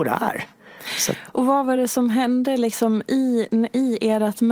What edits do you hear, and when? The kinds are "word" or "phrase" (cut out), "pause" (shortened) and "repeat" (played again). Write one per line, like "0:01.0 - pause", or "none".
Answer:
none